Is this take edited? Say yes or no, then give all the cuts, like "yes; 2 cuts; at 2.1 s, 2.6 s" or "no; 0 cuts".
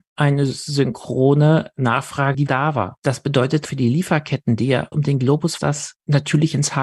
yes; 4 cuts; at 2.5 s, 3.6 s, 4.9 s, 5.6 s